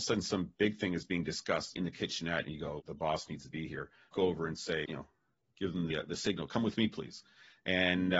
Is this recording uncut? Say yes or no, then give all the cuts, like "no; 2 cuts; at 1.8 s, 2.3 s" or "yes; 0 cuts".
no; 5 cuts; at 1.7 s, 2.8 s, 4.1 s, 4.9 s, 5.9 s